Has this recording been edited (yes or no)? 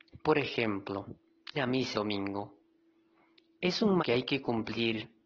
yes